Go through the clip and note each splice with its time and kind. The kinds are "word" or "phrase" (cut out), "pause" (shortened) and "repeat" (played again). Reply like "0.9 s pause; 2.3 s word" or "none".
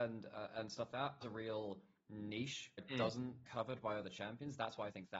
0.9 s word; 1.2 s phrase; 2.8 s word; 3.4 s word